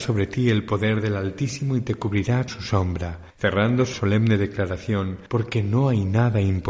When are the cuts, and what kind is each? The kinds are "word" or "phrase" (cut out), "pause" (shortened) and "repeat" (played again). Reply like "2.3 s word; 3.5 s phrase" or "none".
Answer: 2.5 s word; 3.3 s pause; 3.9 s phrase; 5.3 s pause

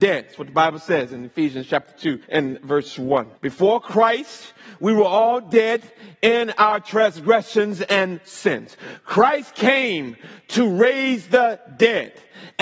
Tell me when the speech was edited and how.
2.2 s pause; 3.4 s pause

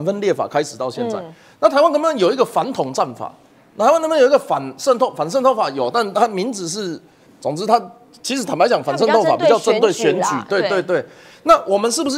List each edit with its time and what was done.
7.3 s word

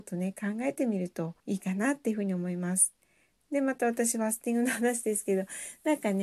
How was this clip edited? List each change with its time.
1.4 s pause

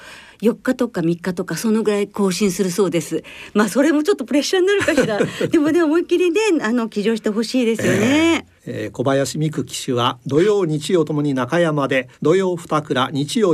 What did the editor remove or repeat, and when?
8.6 s pause; 12.1 s pause

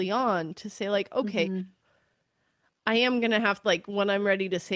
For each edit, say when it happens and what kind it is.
3.6 s word

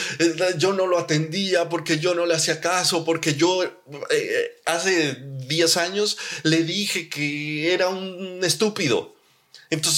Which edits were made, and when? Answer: none

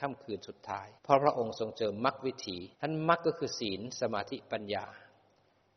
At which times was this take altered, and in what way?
1.0 s pause; 2.7 s pause

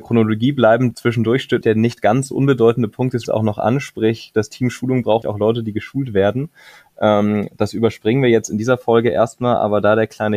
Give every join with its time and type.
0.9 s word; 1.6 s word; 3.2 s word; 5.2 s word

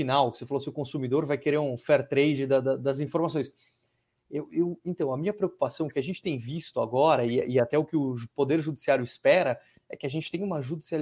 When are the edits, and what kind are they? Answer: none

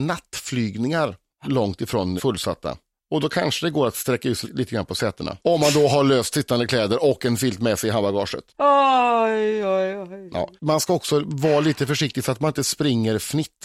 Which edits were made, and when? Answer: 1.4 s word; 2.2 s word; 4.4 s word; 5.4 s pause; 8.5 s pause; 10.6 s pause

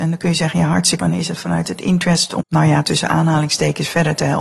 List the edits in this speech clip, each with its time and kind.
1.0 s word; 2.4 s phrase

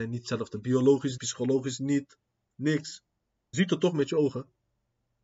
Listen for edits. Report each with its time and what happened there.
1.2 s word; 3.5 s word

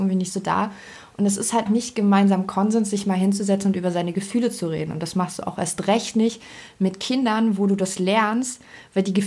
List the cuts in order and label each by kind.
1.7 s word

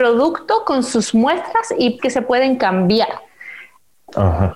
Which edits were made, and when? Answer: 2.0 s word

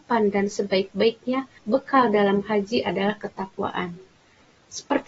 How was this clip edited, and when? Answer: 1.6 s pause

